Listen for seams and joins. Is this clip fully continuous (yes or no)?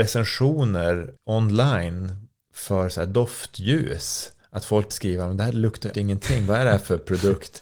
no